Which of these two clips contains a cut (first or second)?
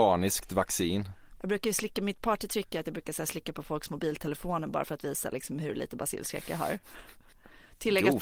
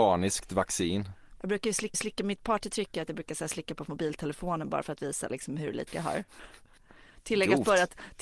second